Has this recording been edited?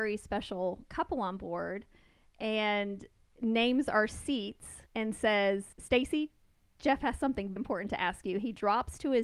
yes; 3 cuts; at 4.9 s, 5.7 s, 7.6 s

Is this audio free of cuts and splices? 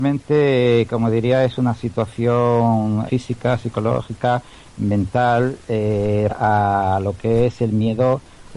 no; 2 cuts; at 3.1 s, 6.3 s

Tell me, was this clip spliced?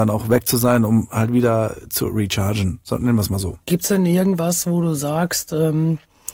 no; 0 cuts

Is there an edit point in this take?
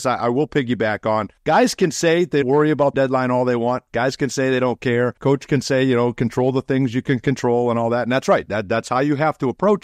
yes; 4 cuts; at 1.4 s, 2.4 s, 2.9 s, 5.2 s

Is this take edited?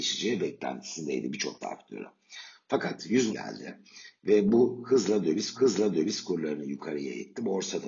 yes; 3 cuts; at 1.6 s, 3.3 s, 5.5 s

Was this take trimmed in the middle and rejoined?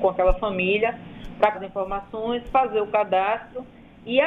yes; 1 cut; at 1.5 s

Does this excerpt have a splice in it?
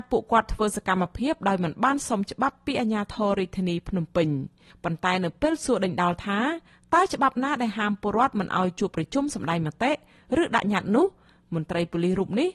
no; 0 cuts

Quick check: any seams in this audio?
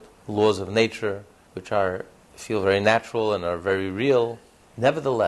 no; 0 cuts

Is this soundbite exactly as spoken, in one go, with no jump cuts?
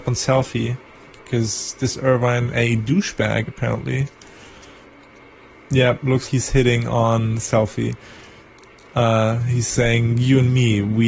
no; 2 cuts; at 2.5 s, 6.3 s

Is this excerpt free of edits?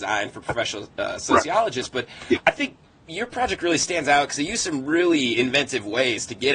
yes; 0 cuts

